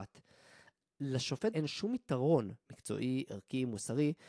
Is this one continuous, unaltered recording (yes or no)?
no